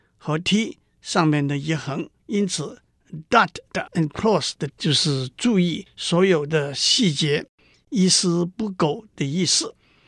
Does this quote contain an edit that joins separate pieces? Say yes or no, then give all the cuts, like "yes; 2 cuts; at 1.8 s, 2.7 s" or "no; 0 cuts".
yes; 3 cuts; at 2.2 s, 3.9 s, 4.7 s